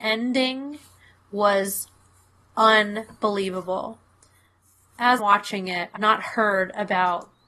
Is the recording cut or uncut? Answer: cut